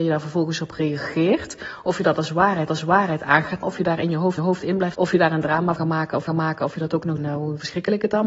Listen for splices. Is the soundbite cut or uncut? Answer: cut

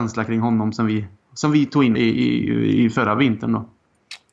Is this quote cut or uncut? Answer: cut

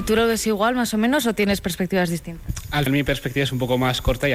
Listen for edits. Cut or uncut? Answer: cut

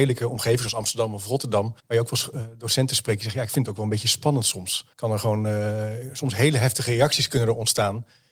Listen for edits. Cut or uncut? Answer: cut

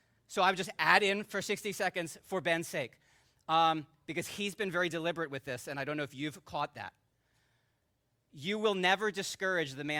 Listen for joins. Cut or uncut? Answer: uncut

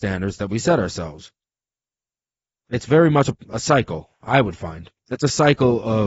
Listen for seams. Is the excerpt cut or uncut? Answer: uncut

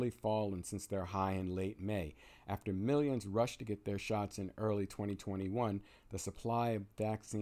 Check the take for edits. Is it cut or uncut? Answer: uncut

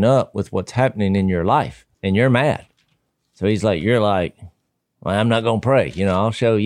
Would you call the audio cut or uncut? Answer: cut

